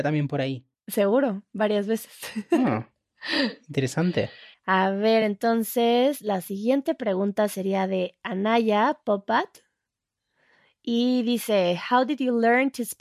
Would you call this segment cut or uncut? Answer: uncut